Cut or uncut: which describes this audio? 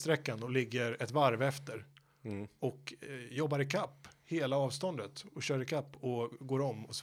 uncut